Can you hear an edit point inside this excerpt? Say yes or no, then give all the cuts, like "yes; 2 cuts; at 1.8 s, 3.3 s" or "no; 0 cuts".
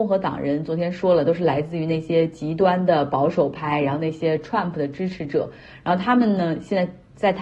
no; 0 cuts